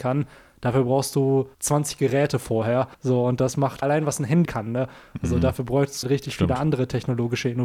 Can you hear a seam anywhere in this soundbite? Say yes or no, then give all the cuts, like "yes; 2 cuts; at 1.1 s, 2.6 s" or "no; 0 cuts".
yes; 5 cuts; at 1.5 s, 2.9 s, 3.8 s, 4.4 s, 6.0 s